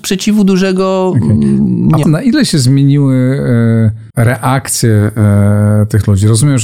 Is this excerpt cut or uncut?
cut